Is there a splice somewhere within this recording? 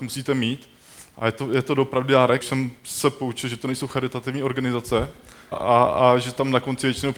yes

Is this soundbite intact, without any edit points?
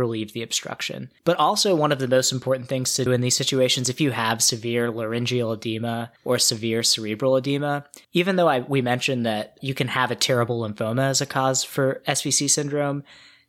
no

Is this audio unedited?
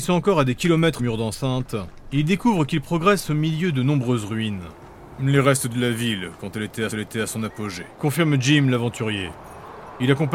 no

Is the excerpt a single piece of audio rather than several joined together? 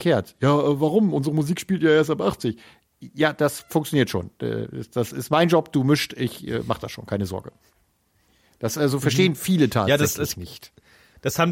yes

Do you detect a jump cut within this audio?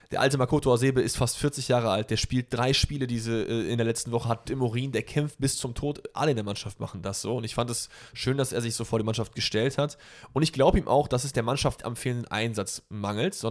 yes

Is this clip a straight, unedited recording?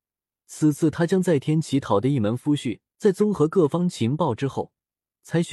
no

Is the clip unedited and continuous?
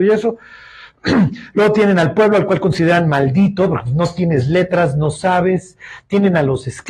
yes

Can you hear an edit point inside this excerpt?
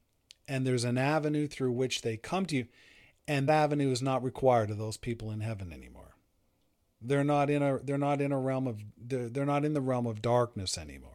yes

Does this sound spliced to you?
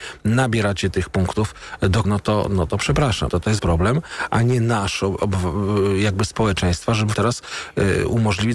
yes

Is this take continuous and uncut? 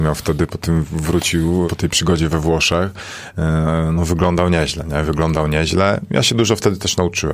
no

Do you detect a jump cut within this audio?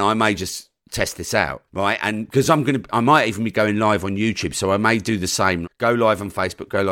yes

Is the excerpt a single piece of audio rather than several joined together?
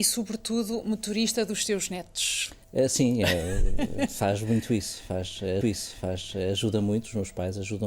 no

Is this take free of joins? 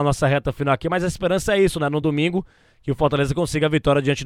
yes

